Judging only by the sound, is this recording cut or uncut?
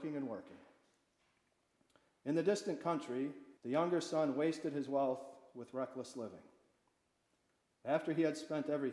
cut